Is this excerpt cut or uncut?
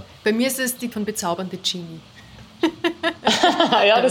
cut